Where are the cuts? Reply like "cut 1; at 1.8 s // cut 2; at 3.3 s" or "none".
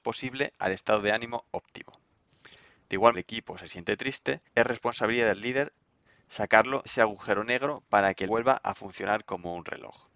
cut 1; at 3.1 s // cut 2; at 4.5 s // cut 3; at 6.9 s // cut 4; at 8.3 s